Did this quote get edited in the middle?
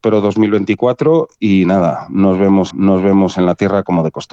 yes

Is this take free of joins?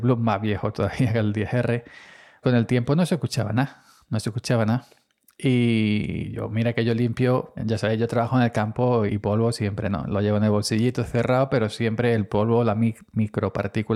no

